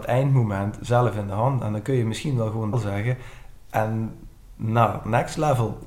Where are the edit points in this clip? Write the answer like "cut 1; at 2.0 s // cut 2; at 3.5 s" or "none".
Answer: cut 1; at 2.7 s